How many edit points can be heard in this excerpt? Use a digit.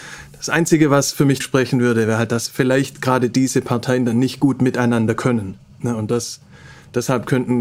2